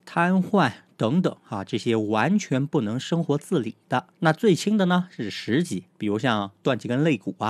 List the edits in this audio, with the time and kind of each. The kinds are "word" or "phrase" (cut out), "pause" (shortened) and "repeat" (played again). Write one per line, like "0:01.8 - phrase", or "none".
0:04.1 - pause
0:05.9 - pause